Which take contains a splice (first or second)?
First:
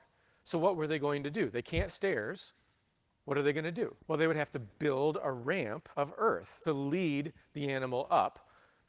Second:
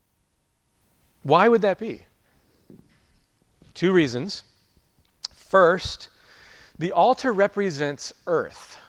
first